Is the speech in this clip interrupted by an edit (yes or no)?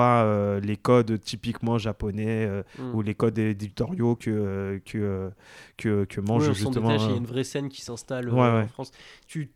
no